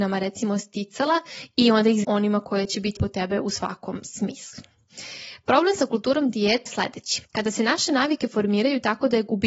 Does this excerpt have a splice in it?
yes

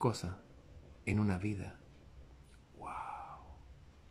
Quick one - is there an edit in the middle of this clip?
no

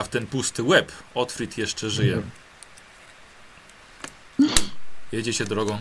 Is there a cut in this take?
no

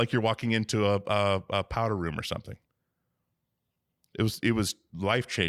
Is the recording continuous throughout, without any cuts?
yes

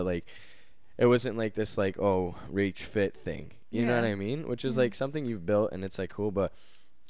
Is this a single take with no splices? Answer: no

